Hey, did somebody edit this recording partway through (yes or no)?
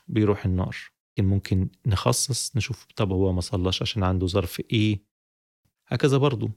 yes